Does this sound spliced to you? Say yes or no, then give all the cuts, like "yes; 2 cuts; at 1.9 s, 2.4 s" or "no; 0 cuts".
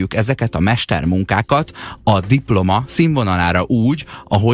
no; 0 cuts